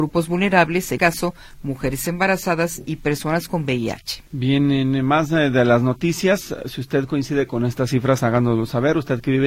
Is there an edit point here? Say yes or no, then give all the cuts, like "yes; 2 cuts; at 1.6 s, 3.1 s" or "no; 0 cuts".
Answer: yes; 2 cuts; at 1.0 s, 4.3 s